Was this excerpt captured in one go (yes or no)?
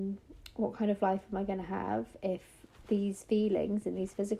yes